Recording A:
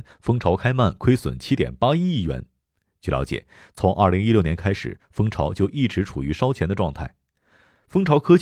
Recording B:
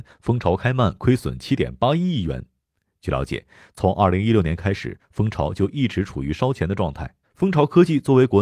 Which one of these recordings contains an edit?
B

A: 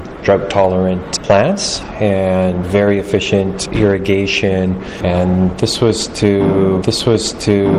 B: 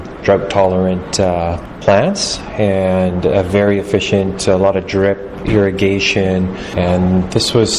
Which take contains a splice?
A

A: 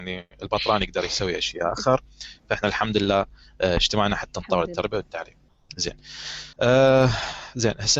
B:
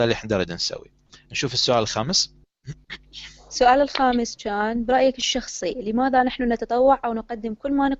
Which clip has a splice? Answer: A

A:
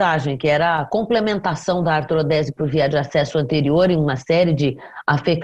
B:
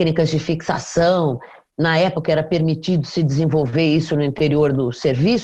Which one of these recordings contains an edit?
B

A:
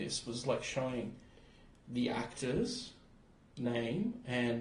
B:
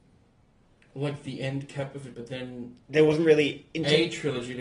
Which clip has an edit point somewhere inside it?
B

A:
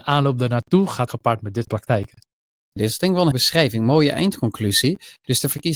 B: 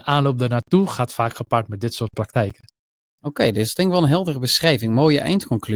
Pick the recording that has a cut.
A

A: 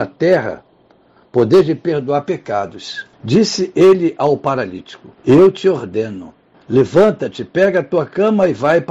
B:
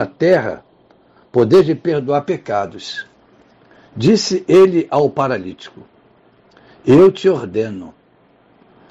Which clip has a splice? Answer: A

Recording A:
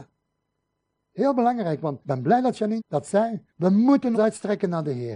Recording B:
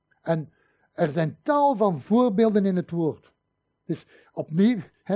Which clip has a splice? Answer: A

